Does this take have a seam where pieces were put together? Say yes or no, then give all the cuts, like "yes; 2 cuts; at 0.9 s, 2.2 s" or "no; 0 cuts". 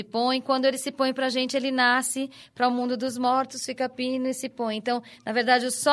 no; 0 cuts